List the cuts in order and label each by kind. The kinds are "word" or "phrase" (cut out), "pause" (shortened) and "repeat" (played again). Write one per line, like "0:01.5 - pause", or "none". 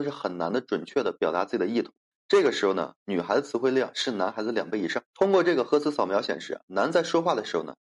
0:02.1 - pause
0:05.1 - pause